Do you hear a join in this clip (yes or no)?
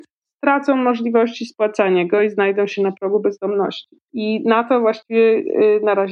no